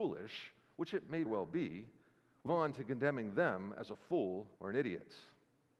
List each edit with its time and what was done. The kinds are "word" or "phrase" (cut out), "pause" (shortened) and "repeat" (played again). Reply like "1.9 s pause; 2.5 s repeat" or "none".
1.3 s word; 2.5 s word; 4.6 s pause